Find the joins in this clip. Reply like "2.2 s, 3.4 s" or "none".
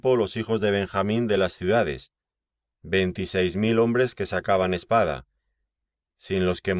none